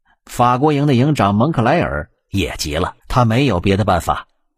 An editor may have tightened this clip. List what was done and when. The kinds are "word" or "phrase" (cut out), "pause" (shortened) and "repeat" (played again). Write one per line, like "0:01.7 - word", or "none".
0:03.0 - pause

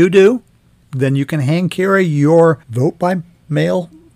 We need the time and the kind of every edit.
0:02.6 - pause

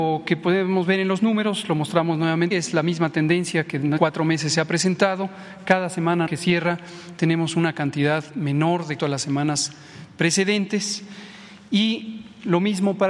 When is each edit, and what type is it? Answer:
0:02.5 - word
0:04.0 - word
0:06.3 - word
0:09.0 - phrase

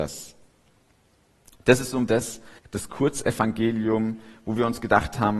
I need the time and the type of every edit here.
0:02.1 - word
0:02.6 - pause

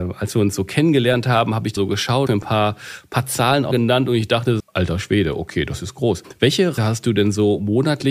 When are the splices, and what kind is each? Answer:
0:01.8 - word
0:02.3 - phrase
0:03.7 - word
0:04.6 - word
0:06.8 - word

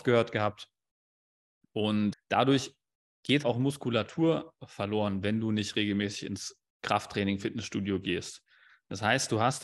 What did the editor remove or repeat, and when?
0:02.1 - word
0:03.4 - word

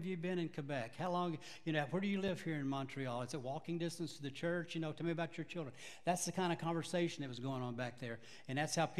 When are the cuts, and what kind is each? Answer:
none

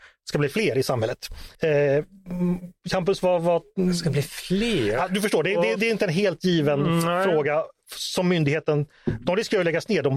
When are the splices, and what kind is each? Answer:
0:01.5 - pause
0:05.8 - word

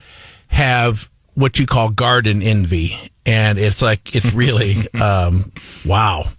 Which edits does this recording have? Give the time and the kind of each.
none

